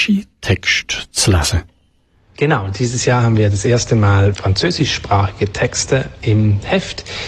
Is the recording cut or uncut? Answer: cut